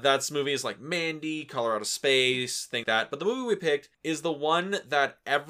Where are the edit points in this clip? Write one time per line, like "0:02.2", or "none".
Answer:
0:02.8
0:03.9